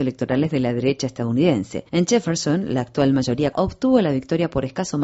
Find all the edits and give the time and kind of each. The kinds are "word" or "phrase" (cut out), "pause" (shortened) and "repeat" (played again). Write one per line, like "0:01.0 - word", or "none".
0:01.9 - pause
0:03.5 - word